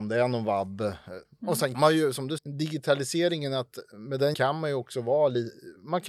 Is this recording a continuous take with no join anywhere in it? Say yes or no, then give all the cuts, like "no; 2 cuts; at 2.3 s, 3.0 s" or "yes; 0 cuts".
no; 3 cuts; at 1.7 s, 2.4 s, 4.3 s